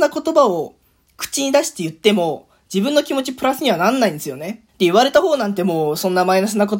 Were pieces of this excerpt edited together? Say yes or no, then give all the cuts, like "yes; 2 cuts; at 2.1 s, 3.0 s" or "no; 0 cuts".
yes; 1 cut; at 4.7 s